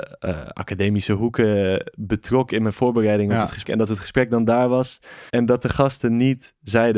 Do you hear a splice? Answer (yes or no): yes